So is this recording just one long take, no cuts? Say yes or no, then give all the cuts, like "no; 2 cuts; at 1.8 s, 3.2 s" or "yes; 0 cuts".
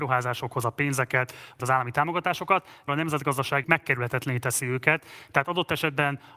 no; 3 cuts; at 1.6 s, 2.9 s, 3.6 s